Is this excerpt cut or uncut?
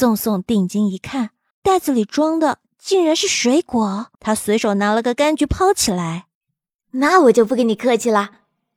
cut